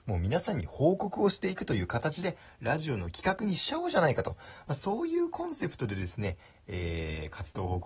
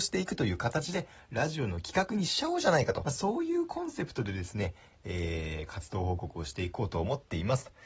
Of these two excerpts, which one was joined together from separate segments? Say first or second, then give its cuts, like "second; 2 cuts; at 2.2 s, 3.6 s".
second; 1 cut; at 3.1 s